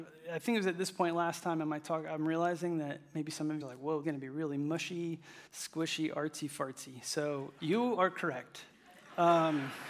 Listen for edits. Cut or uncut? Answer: cut